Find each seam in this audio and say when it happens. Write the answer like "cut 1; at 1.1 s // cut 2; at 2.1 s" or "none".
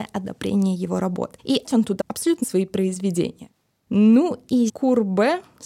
cut 1; at 1.6 s // cut 2; at 2.0 s // cut 3; at 2.4 s // cut 4; at 4.7 s